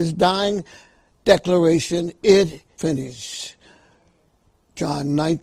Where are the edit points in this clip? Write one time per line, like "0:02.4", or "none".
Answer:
0:02.8